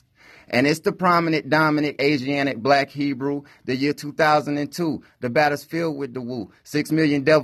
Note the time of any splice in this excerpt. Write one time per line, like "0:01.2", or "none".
0:02.0